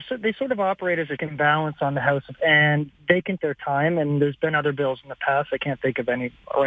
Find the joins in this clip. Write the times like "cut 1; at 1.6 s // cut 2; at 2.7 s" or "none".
cut 1; at 1.2 s // cut 2; at 2.4 s // cut 3; at 3.4 s